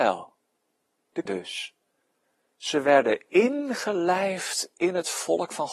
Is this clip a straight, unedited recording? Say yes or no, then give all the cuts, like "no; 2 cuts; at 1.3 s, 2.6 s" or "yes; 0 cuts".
no; 1 cut; at 1.3 s